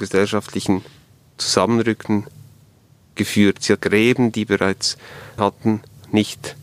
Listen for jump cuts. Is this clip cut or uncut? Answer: cut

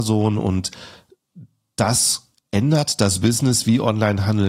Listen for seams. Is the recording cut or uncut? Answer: uncut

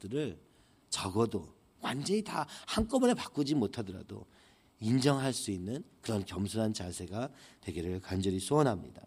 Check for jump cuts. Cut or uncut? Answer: uncut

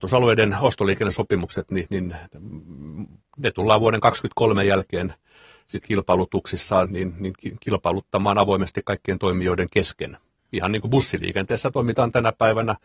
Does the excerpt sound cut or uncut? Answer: cut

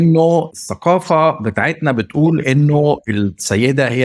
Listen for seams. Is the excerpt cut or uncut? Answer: uncut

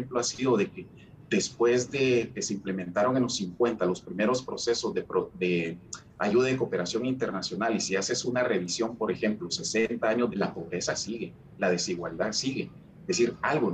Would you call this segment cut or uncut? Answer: cut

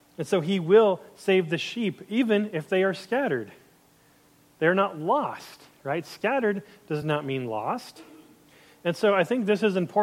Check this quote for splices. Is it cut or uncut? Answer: uncut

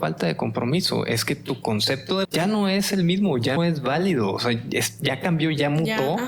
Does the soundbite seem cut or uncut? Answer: cut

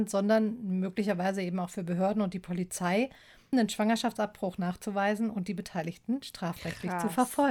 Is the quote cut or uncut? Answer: cut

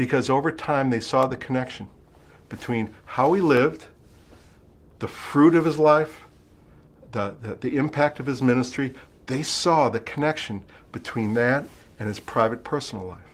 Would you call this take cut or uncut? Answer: uncut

